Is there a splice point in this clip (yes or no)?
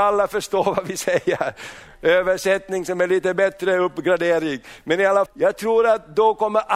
yes